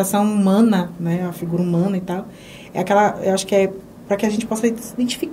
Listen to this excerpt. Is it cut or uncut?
uncut